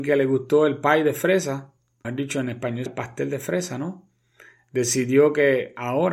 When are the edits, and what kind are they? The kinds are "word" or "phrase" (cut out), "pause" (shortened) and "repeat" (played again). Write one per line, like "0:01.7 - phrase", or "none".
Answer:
0:02.0 - word
0:02.9 - word